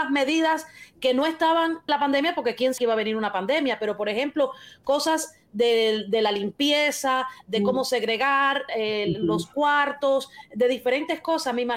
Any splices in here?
yes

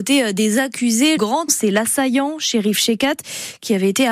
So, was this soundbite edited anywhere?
yes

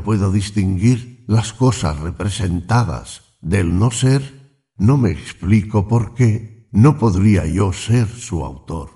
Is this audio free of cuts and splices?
yes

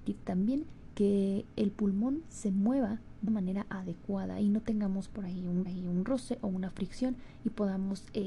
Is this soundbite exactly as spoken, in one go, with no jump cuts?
no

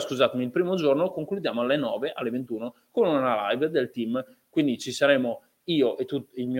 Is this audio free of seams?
yes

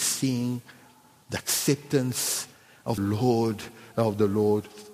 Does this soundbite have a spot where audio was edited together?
yes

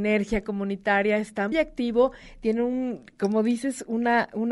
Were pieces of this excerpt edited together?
yes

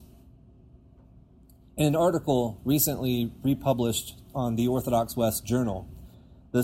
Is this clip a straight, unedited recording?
yes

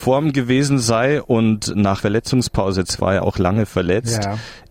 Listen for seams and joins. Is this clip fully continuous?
no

